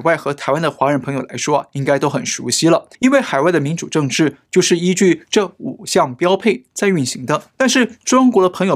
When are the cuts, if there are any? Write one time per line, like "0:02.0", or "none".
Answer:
0:02.9
0:07.5